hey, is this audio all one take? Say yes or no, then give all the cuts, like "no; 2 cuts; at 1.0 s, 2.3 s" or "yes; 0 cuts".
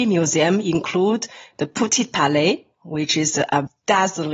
yes; 0 cuts